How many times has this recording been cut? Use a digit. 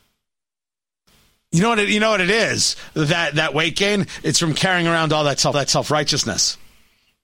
1